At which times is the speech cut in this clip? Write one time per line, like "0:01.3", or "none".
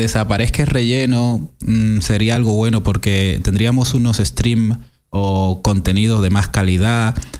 none